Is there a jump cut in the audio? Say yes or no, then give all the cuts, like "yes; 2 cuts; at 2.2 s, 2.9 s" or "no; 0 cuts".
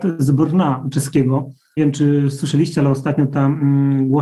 yes; 1 cut; at 1.8 s